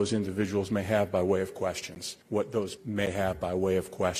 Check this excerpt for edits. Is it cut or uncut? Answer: cut